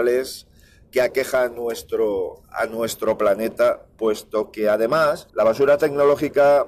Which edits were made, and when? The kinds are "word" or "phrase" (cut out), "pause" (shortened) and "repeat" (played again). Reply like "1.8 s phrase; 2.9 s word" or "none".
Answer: 1.5 s word; 5.3 s pause